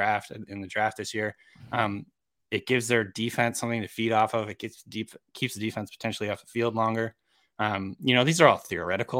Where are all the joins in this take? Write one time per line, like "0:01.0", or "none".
none